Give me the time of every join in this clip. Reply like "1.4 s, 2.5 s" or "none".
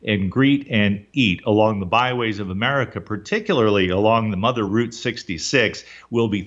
4.7 s